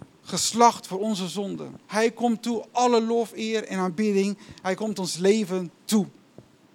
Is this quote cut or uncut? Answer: cut